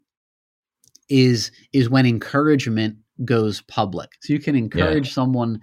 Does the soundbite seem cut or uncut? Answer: cut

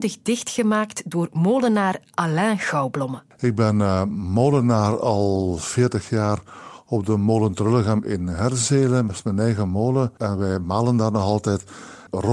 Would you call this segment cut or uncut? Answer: uncut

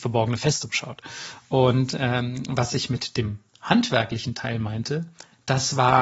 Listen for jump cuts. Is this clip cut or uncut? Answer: uncut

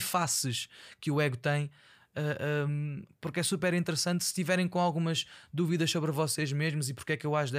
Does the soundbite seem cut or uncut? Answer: uncut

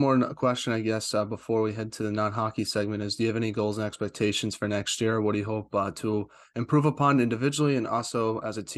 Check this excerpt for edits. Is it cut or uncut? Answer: uncut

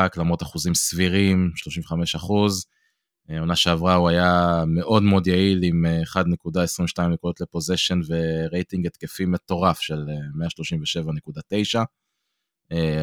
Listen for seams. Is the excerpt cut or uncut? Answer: uncut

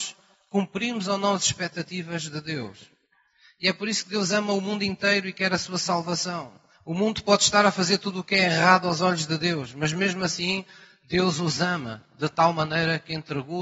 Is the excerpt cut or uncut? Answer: uncut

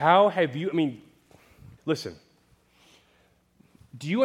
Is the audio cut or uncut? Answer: cut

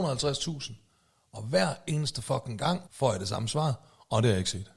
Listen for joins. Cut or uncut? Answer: cut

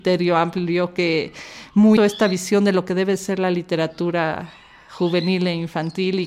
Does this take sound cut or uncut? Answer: cut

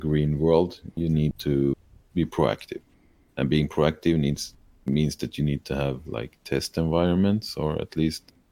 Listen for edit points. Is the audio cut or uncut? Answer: uncut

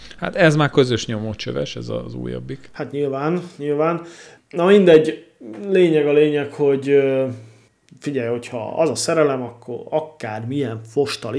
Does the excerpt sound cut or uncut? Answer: uncut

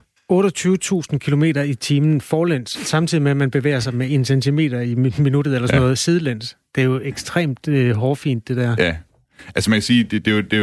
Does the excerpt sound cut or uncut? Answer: uncut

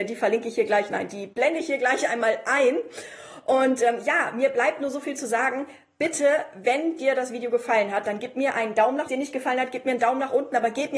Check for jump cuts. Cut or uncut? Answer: cut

